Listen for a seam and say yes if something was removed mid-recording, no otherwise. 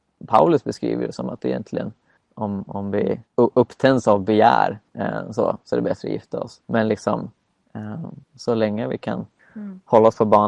yes